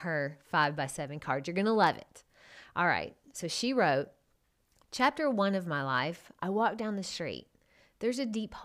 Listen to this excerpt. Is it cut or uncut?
uncut